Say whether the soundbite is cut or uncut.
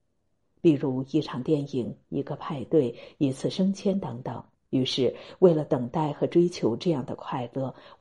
cut